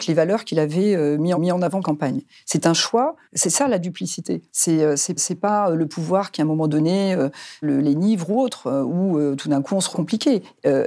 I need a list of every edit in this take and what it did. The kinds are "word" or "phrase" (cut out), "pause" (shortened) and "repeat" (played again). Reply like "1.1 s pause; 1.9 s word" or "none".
1.3 s repeat; 1.8 s phrase; 3.2 s pause; 4.5 s pause; 5.2 s repeat; 7.6 s word; 9.9 s phrase